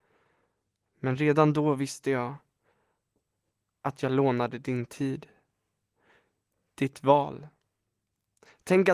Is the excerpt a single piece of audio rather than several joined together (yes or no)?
yes